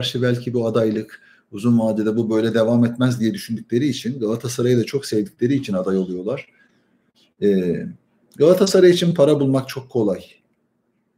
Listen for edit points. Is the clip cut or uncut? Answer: uncut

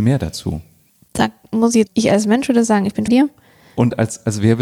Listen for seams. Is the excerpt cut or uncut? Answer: cut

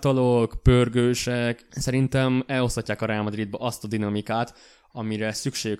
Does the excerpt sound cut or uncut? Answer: uncut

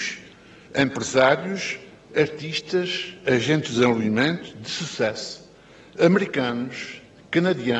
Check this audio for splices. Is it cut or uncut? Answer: uncut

